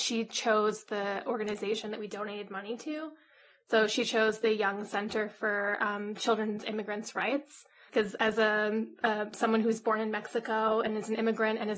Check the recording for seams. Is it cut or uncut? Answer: uncut